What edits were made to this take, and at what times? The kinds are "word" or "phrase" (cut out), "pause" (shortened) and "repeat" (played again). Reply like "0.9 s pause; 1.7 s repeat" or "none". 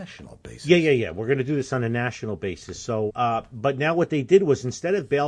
3.1 s word